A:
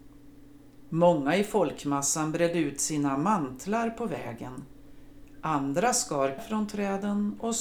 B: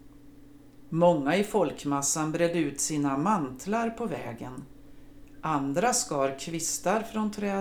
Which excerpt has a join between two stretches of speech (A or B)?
A